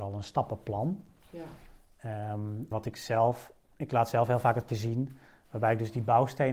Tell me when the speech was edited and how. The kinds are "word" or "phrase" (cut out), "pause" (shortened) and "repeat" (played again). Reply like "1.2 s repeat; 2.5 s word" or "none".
2.7 s word; 3.6 s pause; 4.7 s word